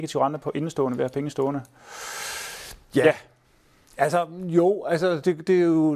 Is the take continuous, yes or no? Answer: yes